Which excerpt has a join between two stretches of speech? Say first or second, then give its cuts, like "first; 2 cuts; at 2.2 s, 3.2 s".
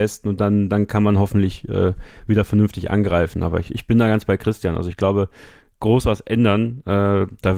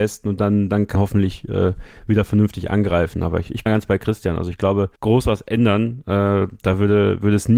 second; 3 cuts; at 0.9 s, 3.7 s, 5.0 s